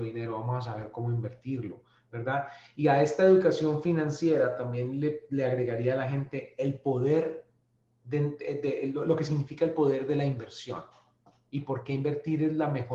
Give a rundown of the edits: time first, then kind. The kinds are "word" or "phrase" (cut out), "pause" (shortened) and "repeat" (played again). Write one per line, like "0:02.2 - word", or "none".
none